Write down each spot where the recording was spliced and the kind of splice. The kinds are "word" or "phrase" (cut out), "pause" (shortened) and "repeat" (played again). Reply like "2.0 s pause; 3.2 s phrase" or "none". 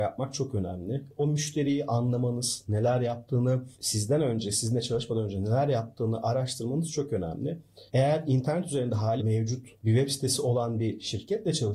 7.9 s pause; 9.2 s word; 9.7 s pause